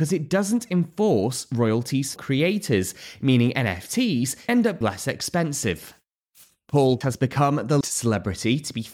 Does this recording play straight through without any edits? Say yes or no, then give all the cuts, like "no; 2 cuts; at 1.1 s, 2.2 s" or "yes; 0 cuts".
no; 5 cuts; at 2.2 s, 4.5 s, 4.8 s, 7.0 s, 7.8 s